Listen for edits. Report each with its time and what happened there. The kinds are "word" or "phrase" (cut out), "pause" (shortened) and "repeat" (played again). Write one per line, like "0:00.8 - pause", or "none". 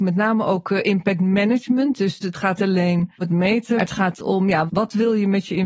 0:02.2 - word
0:02.6 - word
0:03.2 - word
0:03.8 - word
0:04.1 - word
0:04.7 - word